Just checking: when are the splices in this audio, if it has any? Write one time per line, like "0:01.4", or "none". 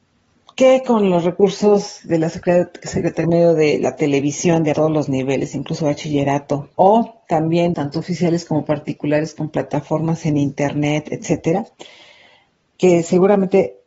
0:03.2
0:04.7
0:06.7
0:07.7